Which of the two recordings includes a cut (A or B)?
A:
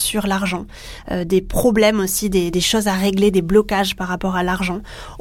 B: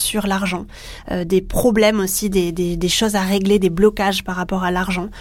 A